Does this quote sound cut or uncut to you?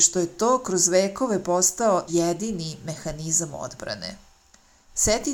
cut